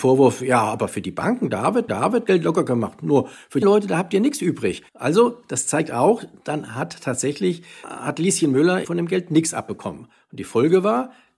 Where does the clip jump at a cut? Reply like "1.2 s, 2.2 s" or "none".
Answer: 1.9 s, 3.6 s, 4.9 s, 7.8 s, 8.8 s